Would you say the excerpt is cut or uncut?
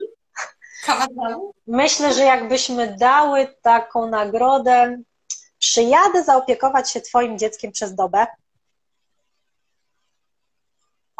uncut